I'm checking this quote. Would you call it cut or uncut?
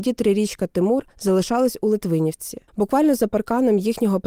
cut